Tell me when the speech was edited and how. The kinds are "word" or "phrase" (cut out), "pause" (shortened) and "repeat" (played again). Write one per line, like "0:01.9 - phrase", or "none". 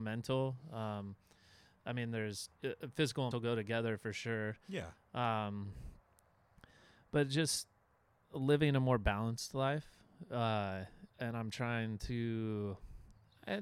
0:02.6 - pause
0:03.3 - word
0:11.1 - pause